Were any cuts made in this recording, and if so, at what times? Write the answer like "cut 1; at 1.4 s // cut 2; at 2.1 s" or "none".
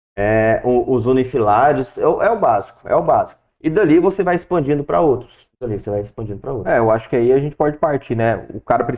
none